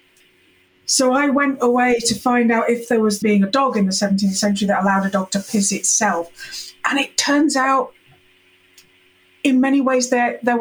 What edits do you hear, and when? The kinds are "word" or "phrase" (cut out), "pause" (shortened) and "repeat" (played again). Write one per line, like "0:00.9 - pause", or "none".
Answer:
0:03.2 - phrase